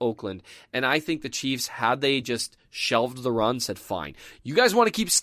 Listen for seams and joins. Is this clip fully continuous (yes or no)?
yes